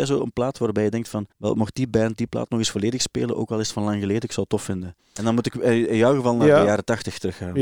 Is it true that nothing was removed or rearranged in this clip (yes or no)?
no